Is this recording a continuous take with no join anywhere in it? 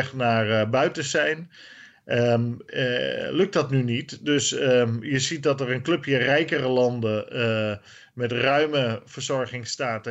yes; 0 cuts

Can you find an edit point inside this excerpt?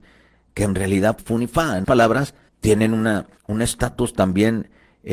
yes; 4 cuts; at 1.2 s, 1.8 s, 2.5 s, 3.4 s

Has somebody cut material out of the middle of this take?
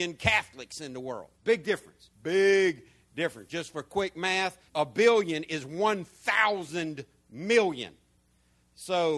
yes; 3 cuts; at 1.3 s, 2.1 s, 4.7 s

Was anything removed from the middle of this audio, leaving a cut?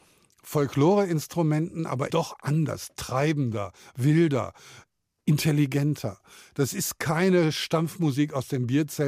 yes; 1 cut; at 2.1 s

